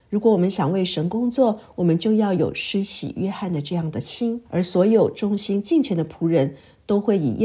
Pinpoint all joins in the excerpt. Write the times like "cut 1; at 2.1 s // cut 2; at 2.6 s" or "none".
cut 1; at 4.5 s